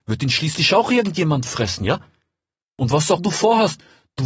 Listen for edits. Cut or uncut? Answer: cut